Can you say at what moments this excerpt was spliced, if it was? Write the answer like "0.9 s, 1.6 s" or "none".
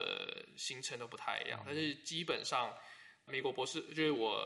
3.3 s